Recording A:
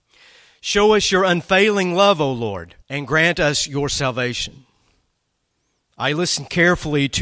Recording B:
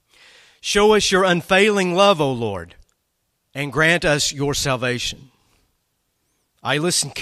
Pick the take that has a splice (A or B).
A